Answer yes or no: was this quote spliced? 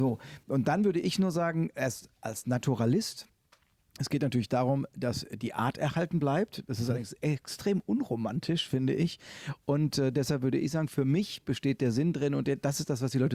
no